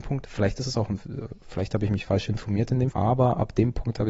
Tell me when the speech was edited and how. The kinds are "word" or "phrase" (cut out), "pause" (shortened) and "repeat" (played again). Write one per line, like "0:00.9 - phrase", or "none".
0:02.9 - word